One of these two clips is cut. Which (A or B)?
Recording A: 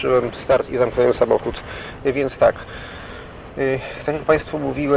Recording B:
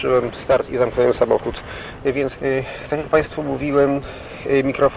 B